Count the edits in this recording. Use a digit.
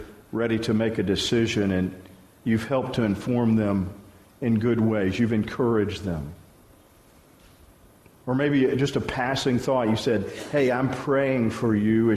0